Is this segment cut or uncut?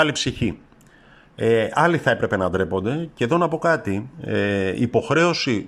cut